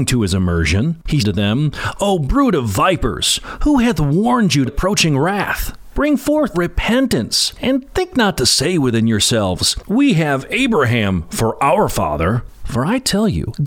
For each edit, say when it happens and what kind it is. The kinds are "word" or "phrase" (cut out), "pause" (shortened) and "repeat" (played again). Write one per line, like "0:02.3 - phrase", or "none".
0:01.2 - word
0:04.7 - phrase
0:06.5 - phrase